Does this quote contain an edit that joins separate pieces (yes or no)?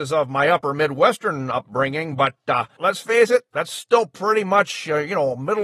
yes